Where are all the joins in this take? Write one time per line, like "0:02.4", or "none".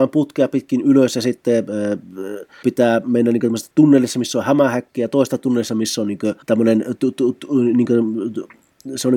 0:02.6
0:06.4